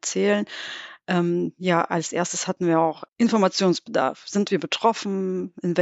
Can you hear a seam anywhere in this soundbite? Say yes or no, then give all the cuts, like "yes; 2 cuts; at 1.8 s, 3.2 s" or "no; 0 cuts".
yes; 1 cut; at 3.1 s